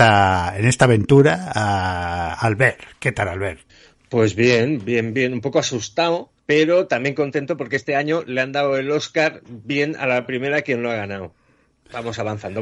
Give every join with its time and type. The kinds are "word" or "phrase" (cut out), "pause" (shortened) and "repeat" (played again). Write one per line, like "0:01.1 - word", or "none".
0:03.7 - pause
0:06.4 - pause